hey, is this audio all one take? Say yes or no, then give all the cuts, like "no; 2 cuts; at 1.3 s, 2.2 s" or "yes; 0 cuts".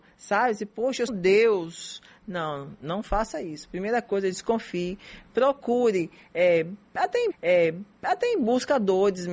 no; 2 cuts; at 1.1 s, 7.3 s